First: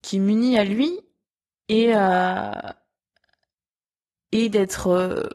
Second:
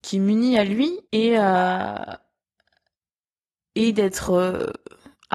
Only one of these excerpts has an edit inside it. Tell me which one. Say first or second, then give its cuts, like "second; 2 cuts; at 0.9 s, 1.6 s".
second; 1 cut; at 1.0 s